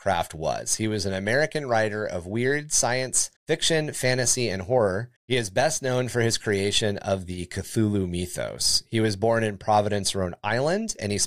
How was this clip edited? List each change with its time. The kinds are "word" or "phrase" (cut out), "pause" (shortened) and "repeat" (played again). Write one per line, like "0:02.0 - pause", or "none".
0:03.4 - pause
0:05.2 - pause